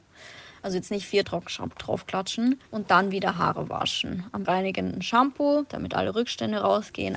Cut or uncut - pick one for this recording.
cut